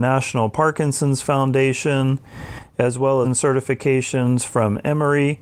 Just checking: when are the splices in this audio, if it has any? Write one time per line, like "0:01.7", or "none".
0:03.2

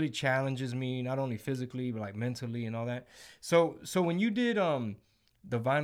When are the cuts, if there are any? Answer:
none

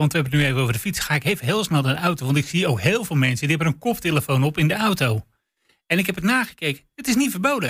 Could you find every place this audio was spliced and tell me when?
none

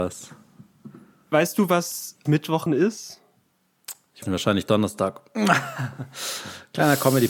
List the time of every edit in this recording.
0:02.3
0:02.7
0:04.2

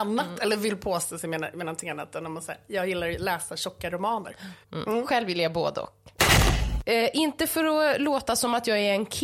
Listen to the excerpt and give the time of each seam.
0:04.6

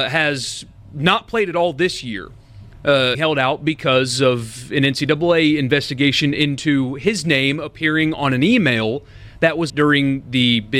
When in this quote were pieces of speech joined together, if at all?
0:03.1
0:09.7

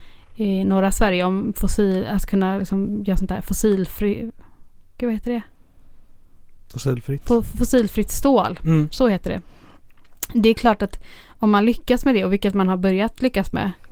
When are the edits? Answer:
none

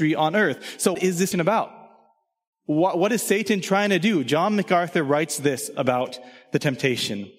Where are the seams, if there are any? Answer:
0:00.9
0:01.3

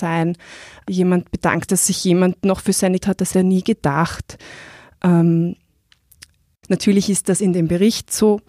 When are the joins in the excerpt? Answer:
0:01.7
0:03.0
0:03.3

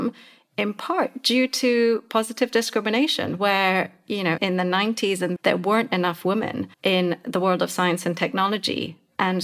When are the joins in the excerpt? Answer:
0:04.4
0:05.4
0:06.7

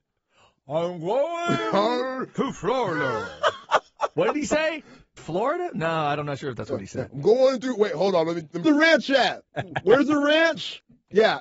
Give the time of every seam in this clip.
0:05.2
0:08.6

